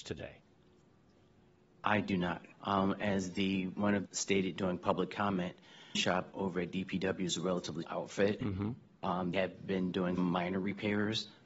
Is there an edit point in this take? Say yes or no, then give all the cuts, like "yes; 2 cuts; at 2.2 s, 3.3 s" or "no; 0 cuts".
yes; 6 cuts; at 2.5 s, 4.1 s, 6.0 s, 7.8 s, 9.3 s, 10.2 s